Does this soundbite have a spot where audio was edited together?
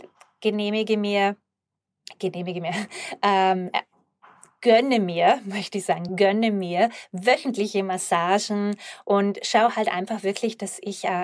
no; 0 cuts

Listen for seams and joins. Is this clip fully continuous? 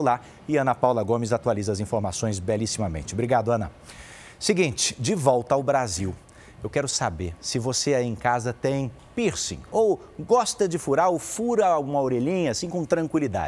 yes; 0 cuts

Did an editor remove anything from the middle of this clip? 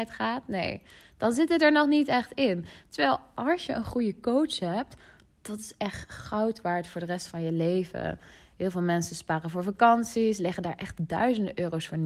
no; 0 cuts

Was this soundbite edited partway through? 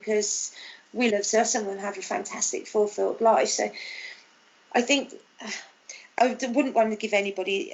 yes; 2 cuts; at 1.1 s, 6.2 s

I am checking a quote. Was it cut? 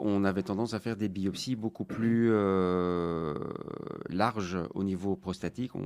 no; 0 cuts

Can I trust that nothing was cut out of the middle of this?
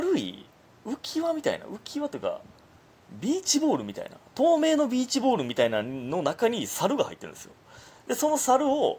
yes; 0 cuts

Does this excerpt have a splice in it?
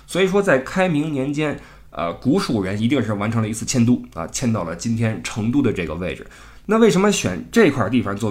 no; 0 cuts

